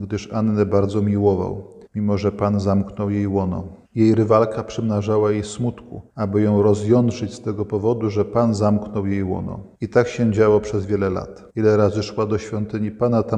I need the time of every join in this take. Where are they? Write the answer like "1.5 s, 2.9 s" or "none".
1.9 s, 3.8 s, 6.1 s, 9.7 s, 11.5 s